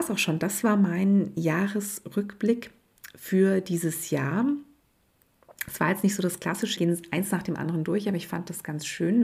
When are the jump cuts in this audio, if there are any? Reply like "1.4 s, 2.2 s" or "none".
6.8 s